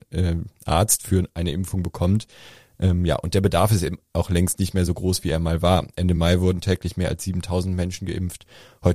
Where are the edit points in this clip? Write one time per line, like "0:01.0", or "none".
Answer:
none